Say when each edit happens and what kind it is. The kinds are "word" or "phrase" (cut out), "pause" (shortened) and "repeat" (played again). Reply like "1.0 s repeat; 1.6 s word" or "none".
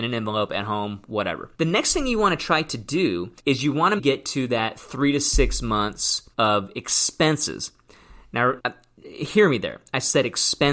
1.5 s pause; 3.4 s pause; 4.0 s word; 6.3 s pause; 8.6 s word